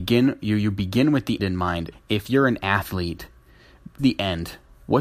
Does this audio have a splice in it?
yes; 3 cuts; at 1.4 s, 1.9 s, 4.0 s

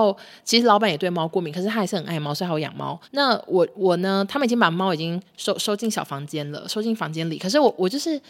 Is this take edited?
yes; 1 cut; at 3.0 s

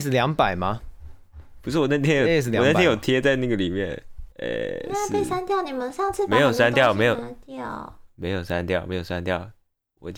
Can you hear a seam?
yes; 1 cut; at 4.3 s

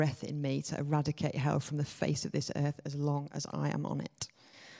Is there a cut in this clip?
no; 0 cuts

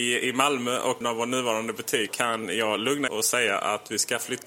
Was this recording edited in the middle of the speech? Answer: yes; 3 cuts; at 1.0 s, 2.1 s, 3.1 s

